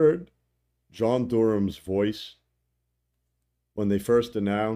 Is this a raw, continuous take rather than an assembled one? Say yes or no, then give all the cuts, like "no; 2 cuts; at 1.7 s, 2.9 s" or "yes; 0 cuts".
yes; 0 cuts